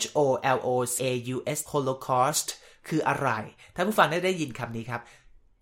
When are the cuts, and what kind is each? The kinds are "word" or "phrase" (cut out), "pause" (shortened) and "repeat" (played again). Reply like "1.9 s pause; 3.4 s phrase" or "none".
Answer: 1.0 s word; 1.7 s word

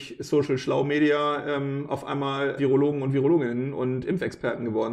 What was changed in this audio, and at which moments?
2.6 s word

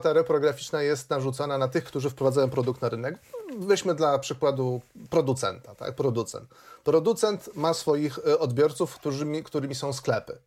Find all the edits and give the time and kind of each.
none

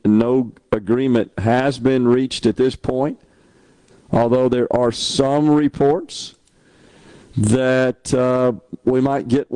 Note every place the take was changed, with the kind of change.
none

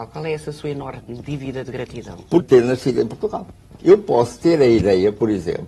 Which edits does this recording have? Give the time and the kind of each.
2.4 s phrase

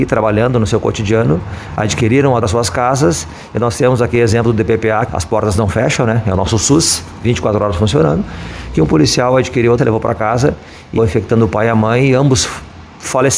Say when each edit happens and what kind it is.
2.4 s phrase; 5.1 s word; 9.8 s word; 11.0 s word

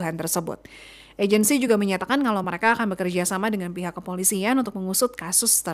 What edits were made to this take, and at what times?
none

